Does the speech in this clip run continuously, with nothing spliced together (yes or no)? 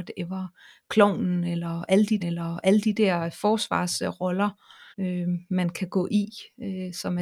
no